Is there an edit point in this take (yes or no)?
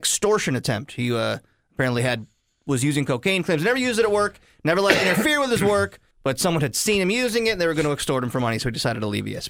yes